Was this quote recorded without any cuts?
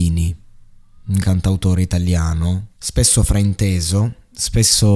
no; 2 cuts; at 1.2 s, 2.7 s

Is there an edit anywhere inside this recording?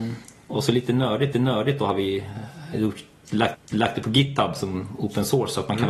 yes; 3 cuts; at 1.3 s, 2.7 s, 3.5 s

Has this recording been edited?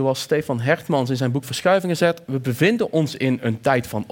no; 0 cuts

